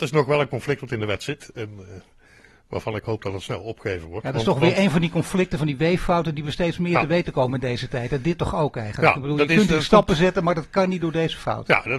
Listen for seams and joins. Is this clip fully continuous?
yes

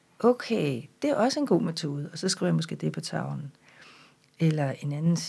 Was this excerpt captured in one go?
yes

